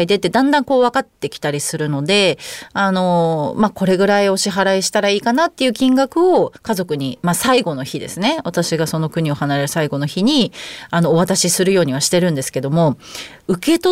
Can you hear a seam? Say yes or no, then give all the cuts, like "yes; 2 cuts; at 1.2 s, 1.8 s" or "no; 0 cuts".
yes; 1 cut; at 6.6 s